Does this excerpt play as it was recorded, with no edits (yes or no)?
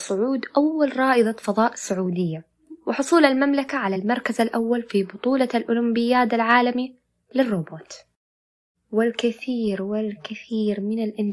yes